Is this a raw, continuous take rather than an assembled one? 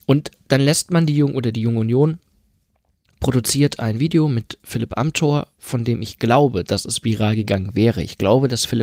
yes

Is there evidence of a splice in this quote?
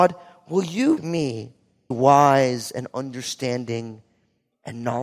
yes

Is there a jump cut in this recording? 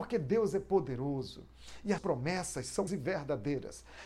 yes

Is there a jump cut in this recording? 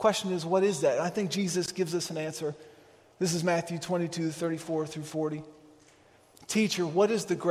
no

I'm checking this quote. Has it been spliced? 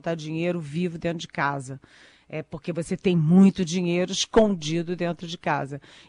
no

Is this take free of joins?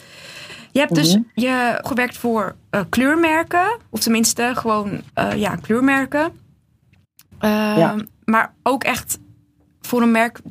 no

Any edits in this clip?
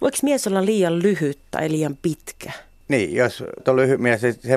yes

